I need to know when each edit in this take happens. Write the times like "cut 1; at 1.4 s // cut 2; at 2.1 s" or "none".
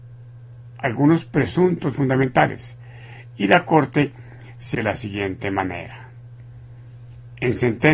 cut 1; at 1.9 s // cut 2; at 4.7 s